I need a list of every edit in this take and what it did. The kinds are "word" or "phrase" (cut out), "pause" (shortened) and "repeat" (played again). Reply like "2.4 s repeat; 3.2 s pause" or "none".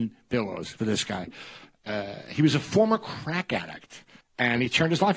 4.2 s pause